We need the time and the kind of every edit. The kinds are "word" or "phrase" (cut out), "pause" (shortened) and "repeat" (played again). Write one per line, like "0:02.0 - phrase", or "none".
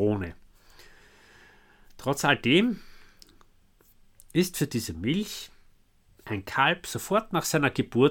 none